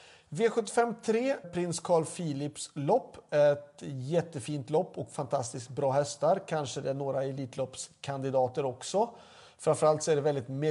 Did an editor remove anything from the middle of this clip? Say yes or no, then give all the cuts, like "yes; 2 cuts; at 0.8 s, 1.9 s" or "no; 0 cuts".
yes; 1 cut; at 1.4 s